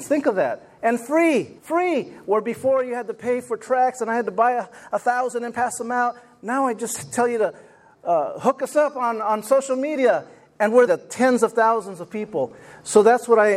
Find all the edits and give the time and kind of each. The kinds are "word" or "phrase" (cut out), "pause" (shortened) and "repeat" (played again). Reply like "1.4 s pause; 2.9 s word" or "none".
1.6 s pause; 10.9 s phrase